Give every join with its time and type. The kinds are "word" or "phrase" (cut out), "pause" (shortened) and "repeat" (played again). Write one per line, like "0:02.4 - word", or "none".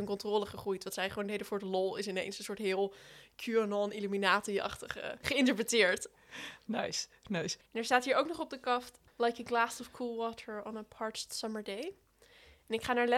0:07.7 - pause